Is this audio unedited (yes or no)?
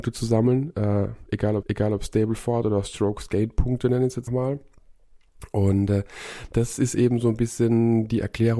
no